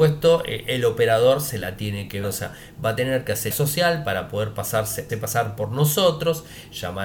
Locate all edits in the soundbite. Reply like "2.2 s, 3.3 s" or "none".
2.2 s, 3.5 s, 5.1 s